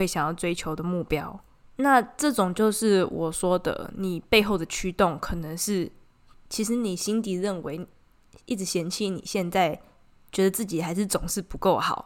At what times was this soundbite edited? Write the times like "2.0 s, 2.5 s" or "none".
1.6 s